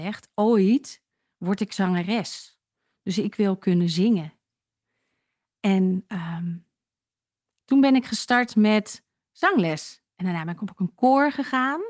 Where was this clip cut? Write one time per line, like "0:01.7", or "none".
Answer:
0:10.1